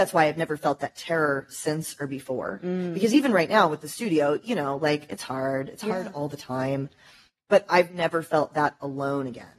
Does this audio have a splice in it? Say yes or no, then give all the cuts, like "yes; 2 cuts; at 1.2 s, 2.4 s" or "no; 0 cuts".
no; 0 cuts